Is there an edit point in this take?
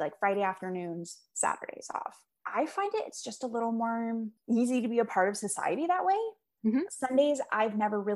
no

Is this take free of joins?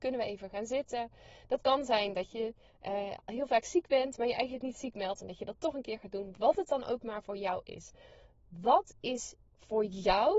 yes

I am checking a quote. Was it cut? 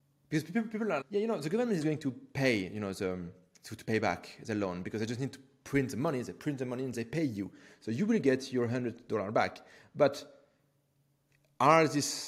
yes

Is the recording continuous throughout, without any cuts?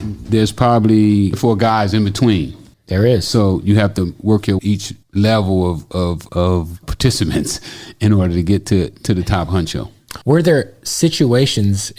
no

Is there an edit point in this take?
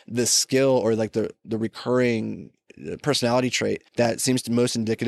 yes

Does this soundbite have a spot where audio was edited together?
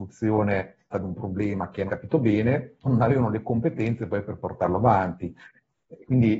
yes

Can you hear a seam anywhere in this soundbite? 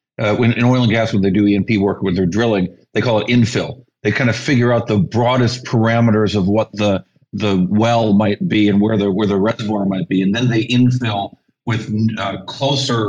no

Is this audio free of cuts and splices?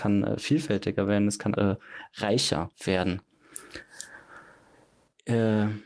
no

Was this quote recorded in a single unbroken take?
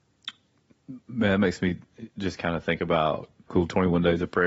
no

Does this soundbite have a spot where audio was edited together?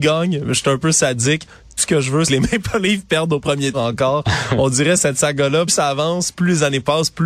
yes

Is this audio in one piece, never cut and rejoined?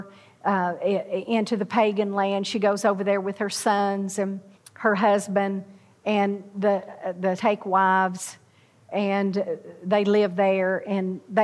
no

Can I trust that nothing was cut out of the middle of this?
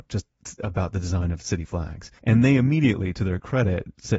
no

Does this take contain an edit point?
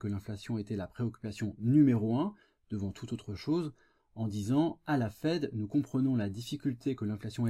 no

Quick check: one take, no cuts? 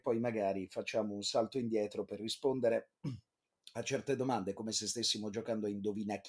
yes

